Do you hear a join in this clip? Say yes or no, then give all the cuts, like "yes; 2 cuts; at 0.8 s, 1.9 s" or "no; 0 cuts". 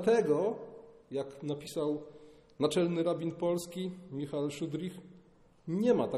no; 0 cuts